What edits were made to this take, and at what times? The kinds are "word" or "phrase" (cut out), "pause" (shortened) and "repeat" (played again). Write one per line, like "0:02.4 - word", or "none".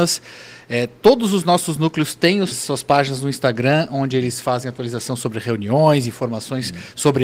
0:02.5 - word